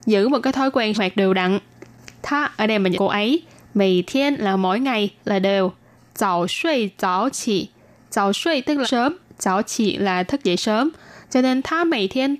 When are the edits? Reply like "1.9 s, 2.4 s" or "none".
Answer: 0.9 s, 2.9 s, 5.2 s, 8.8 s